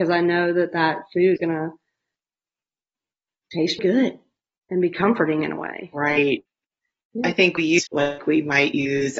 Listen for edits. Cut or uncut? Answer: cut